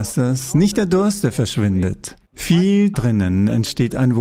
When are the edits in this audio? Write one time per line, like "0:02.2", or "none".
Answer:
0:02.9